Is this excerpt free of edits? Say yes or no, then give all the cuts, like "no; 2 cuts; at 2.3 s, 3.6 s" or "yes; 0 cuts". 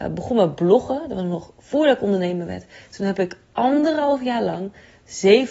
yes; 0 cuts